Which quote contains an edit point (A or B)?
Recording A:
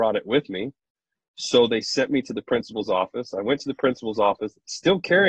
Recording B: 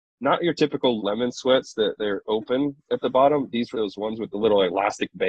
B